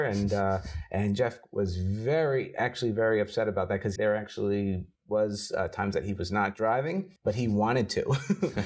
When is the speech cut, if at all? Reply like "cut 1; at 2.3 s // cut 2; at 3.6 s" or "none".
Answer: cut 1; at 4.0 s // cut 2; at 5.0 s // cut 3; at 7.2 s